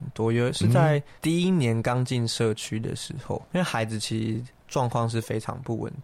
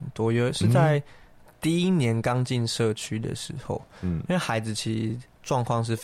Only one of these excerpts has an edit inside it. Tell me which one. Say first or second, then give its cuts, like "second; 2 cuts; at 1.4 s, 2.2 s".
first; 2 cuts; at 1.2 s, 3.5 s